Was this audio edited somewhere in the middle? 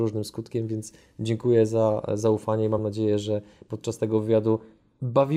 no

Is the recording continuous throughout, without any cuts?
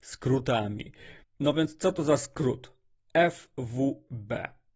no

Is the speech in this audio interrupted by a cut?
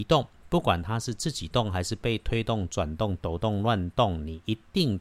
no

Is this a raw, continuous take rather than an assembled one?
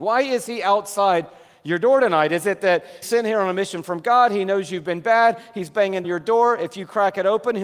no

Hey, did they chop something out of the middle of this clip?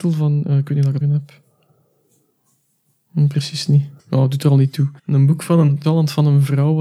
yes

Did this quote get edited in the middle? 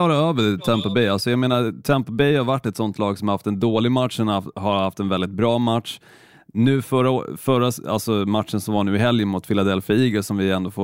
no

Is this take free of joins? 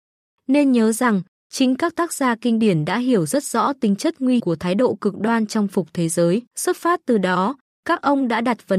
no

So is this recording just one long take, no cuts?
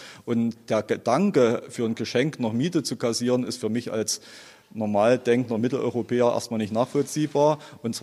yes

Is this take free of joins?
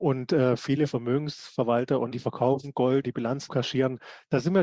no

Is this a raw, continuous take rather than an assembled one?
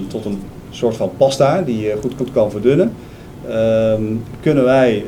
no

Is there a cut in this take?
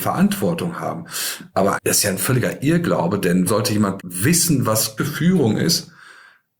yes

